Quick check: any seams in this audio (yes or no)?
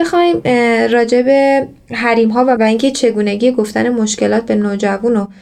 yes